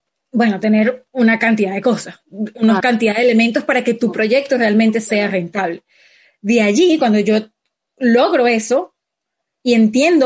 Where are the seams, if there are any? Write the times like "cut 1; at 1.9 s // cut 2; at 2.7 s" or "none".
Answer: none